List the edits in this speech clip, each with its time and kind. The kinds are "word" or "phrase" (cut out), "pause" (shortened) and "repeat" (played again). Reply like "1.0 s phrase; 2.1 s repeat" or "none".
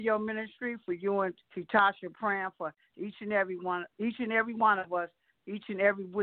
1.4 s pause; 3.9 s pause